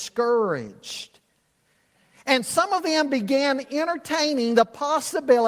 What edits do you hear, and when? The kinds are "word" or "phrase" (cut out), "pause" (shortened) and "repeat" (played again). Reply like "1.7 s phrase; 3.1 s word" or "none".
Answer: none

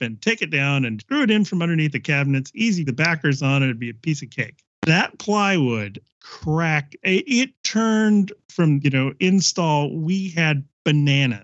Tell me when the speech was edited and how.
1.0 s word; 2.9 s word; 4.7 s pause; 6.1 s word; 8.8 s phrase

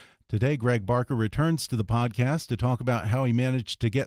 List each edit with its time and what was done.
none

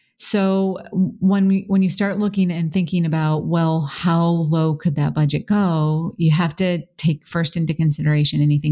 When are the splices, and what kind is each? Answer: none

